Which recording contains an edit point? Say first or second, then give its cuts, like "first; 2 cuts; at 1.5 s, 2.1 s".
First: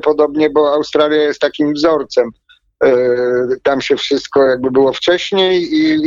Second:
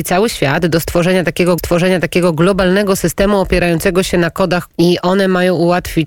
second; 2 cuts; at 1.6 s, 4.7 s